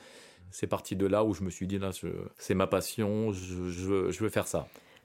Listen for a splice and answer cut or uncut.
cut